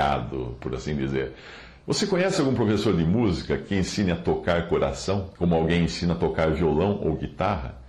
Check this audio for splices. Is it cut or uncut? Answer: cut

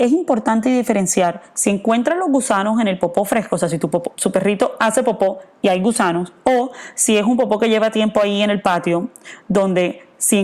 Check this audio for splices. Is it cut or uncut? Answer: uncut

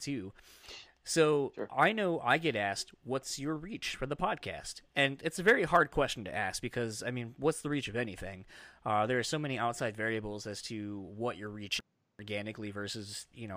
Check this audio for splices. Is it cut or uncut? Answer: uncut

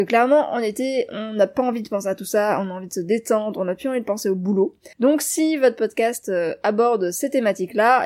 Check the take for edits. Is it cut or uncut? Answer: cut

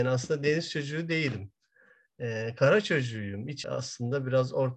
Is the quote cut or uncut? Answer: cut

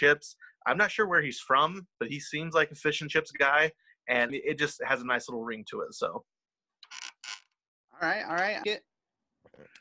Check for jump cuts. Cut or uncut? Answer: cut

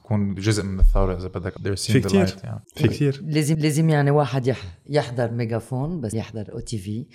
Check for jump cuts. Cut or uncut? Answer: cut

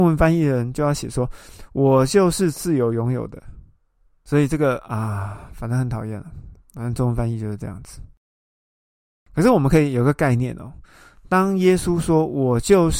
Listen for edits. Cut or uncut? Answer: uncut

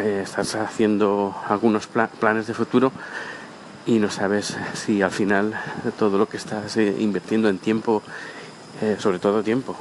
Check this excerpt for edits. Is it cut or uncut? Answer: uncut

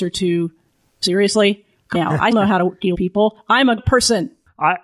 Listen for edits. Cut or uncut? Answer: cut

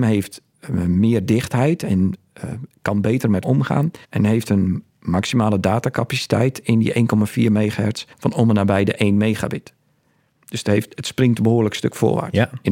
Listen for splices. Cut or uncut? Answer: cut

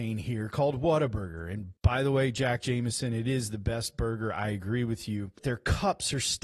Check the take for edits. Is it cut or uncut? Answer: cut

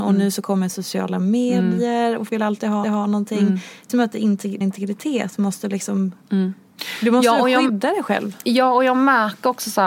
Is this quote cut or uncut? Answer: cut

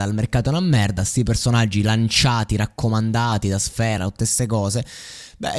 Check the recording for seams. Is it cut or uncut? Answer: uncut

